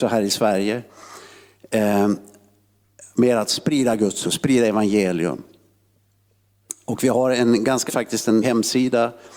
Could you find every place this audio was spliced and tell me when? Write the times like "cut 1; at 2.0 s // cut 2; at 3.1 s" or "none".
cut 1; at 4.2 s // cut 2; at 7.9 s // cut 3; at 8.4 s